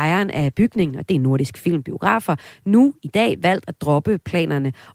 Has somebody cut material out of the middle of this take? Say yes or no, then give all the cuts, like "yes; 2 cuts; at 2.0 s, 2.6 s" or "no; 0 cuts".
no; 0 cuts